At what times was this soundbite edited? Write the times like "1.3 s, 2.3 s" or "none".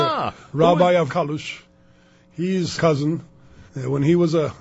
1.1 s, 2.8 s, 3.7 s